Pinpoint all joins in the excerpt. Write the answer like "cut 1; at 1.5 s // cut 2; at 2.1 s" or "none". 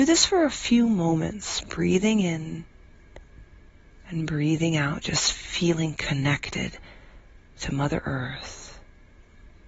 none